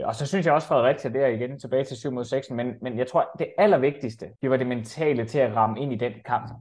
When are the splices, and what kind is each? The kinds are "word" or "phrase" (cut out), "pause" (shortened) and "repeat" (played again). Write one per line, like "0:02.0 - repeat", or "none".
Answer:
0:04.3 - pause